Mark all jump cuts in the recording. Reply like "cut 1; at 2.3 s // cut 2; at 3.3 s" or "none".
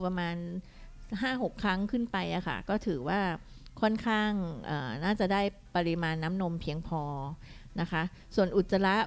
none